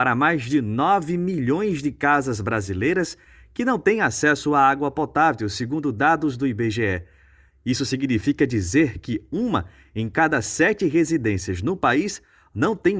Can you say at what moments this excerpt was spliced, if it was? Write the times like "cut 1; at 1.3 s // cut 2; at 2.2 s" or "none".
none